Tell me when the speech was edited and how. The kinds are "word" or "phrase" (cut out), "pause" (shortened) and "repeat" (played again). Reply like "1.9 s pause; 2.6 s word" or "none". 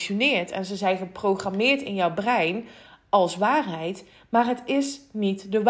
none